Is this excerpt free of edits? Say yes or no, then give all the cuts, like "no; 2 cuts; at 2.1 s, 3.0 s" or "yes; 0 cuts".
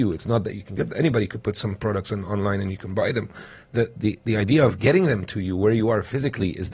yes; 0 cuts